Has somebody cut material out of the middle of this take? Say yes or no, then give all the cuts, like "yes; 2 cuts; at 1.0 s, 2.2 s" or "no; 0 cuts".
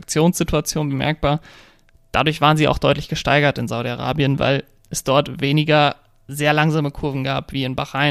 no; 0 cuts